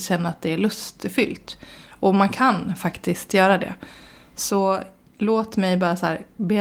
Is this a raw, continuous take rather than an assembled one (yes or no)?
yes